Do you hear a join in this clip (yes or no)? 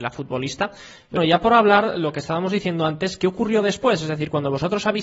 yes